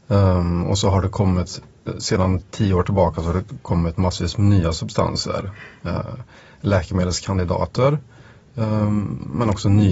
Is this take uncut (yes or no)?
yes